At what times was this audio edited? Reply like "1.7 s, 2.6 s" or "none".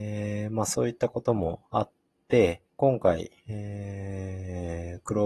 1.6 s, 2.7 s, 3.4 s